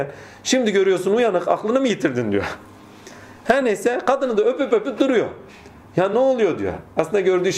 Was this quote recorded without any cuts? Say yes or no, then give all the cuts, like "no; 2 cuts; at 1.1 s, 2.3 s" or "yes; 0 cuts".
yes; 0 cuts